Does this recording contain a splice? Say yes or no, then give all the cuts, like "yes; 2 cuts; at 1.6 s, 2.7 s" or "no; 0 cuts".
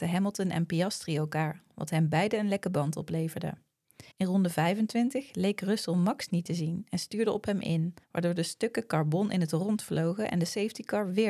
yes; 2 cuts; at 4.1 s, 8.0 s